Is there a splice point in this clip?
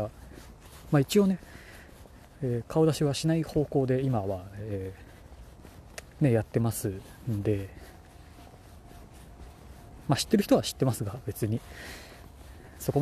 no; 0 cuts

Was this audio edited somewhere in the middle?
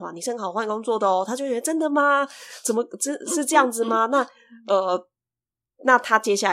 no; 0 cuts

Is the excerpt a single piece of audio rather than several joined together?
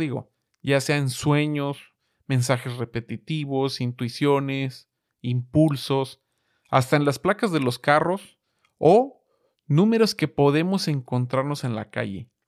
yes; 0 cuts

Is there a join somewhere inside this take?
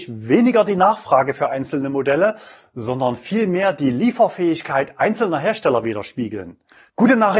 no; 0 cuts

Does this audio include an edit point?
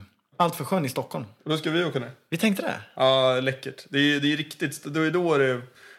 no; 0 cuts

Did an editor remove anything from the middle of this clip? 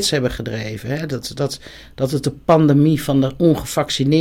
no; 0 cuts

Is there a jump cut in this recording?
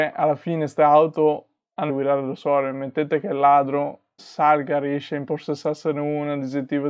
yes; 2 cuts; at 1.9 s, 4.2 s

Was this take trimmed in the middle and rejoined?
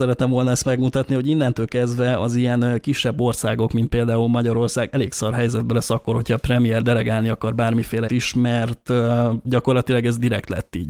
yes; 2 cuts; at 6.8 s, 8.1 s

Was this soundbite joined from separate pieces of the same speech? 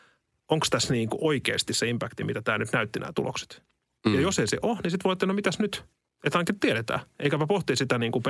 no; 0 cuts

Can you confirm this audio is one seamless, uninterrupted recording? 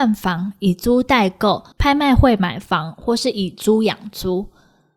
no; 1 cut; at 1.7 s

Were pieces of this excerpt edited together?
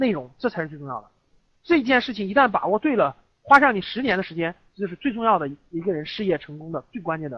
yes; 1 cut; at 1.4 s

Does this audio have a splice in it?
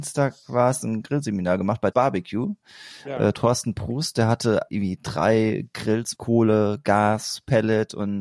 yes; 3 cuts; at 1.9 s, 4.7 s, 6.1 s

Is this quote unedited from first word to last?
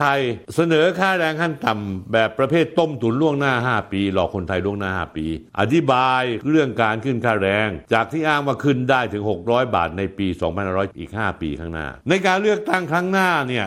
yes; 0 cuts

